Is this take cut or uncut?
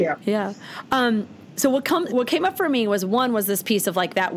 cut